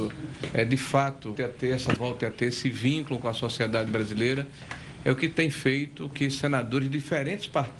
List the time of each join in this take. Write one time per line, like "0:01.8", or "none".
0:01.3
0:02.0
0:06.1